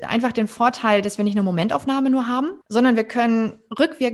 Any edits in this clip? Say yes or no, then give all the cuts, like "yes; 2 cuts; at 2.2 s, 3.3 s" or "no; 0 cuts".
yes; 1 cut; at 2.6 s